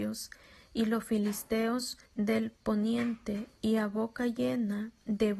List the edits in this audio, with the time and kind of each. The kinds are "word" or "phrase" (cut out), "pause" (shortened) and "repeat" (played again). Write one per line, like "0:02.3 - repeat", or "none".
0:02.1 - pause